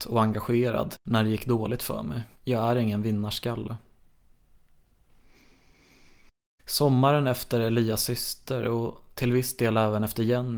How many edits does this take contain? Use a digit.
2